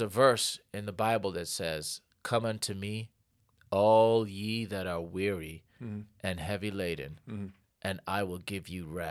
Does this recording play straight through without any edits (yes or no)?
yes